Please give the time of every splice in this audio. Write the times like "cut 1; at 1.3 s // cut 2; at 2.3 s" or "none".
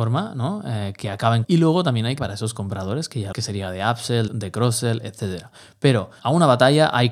cut 1; at 1.4 s // cut 2; at 2.2 s // cut 3; at 3.3 s // cut 4; at 4.3 s // cut 5; at 6.2 s